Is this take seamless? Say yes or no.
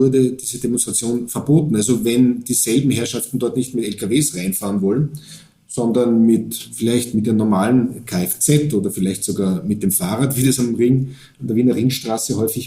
yes